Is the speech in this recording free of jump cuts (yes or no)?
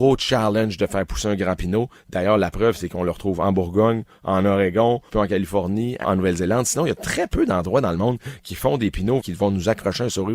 no